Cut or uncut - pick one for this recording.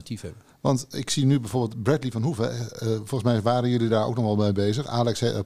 uncut